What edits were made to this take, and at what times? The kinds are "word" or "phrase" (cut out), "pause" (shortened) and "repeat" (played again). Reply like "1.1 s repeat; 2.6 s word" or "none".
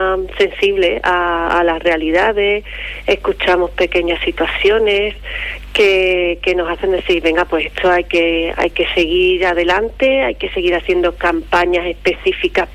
none